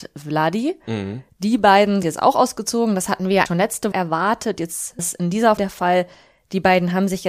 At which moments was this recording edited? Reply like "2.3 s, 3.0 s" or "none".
2.0 s, 3.5 s, 3.9 s, 5.0 s, 5.6 s